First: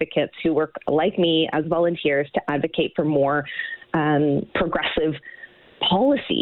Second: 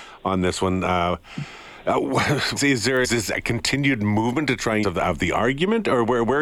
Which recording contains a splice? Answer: second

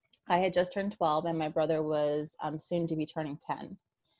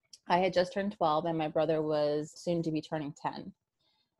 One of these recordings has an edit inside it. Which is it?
second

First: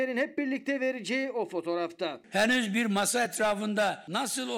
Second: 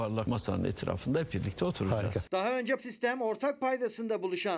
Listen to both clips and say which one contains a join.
second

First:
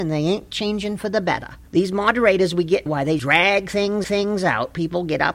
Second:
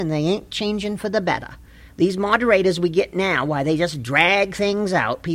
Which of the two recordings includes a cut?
first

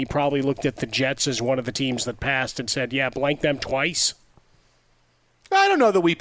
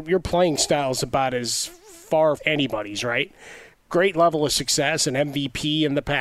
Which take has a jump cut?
second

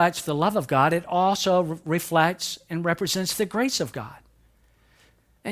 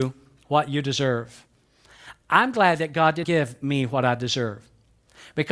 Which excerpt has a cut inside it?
second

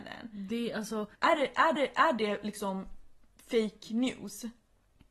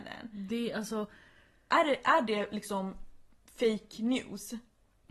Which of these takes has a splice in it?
first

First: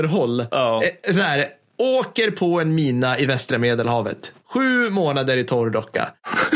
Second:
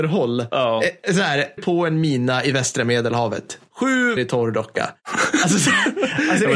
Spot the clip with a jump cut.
second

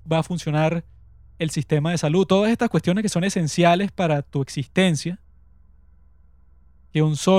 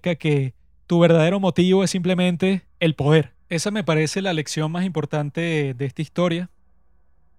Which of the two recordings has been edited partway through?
second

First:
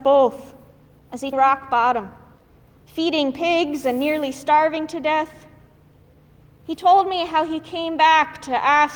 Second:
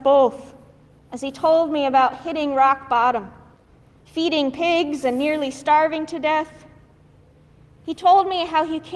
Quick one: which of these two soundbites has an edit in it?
first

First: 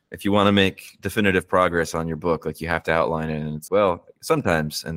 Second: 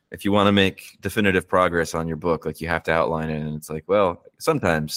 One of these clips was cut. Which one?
first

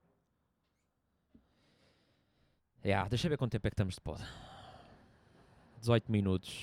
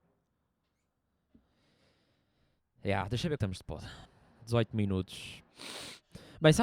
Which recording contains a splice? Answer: second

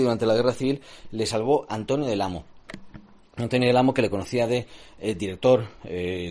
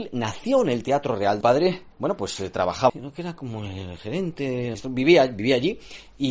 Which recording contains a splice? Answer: second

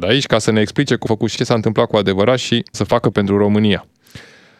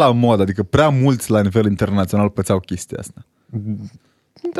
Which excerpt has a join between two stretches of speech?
first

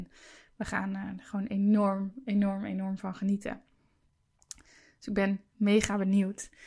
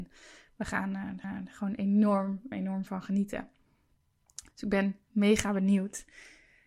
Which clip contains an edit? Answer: second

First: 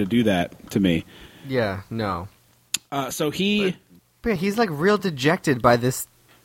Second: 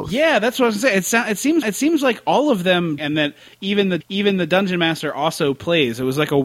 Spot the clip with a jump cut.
second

